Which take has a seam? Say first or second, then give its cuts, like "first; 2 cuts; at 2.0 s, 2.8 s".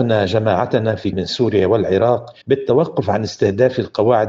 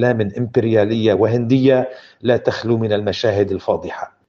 first; 2 cuts; at 1.1 s, 2.4 s